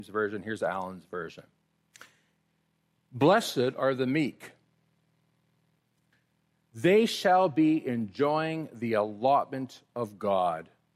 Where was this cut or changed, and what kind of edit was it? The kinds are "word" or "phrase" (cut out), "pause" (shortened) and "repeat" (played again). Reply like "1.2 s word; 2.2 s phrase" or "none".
none